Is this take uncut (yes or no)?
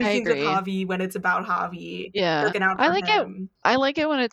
no